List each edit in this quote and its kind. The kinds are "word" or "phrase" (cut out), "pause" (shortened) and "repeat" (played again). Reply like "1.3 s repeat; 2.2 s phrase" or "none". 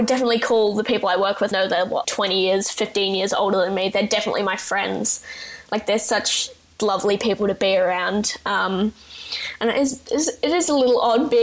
1.5 s word; 2.0 s word; 6.8 s word